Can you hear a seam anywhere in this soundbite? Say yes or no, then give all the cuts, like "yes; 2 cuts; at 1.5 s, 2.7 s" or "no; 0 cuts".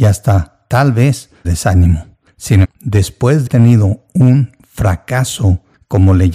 yes; 3 cuts; at 1.4 s, 2.6 s, 3.5 s